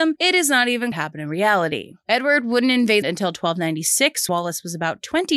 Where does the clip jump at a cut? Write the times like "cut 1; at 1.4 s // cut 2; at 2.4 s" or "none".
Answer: cut 1; at 0.9 s // cut 2; at 3.0 s // cut 3; at 4.3 s